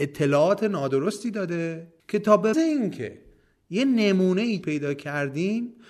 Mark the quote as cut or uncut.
cut